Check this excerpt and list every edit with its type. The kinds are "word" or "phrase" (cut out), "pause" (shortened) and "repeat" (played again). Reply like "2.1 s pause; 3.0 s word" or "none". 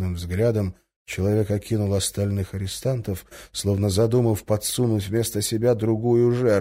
none